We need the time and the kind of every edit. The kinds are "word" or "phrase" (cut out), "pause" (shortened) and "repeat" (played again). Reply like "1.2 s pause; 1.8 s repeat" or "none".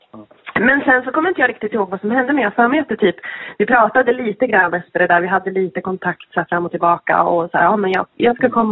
none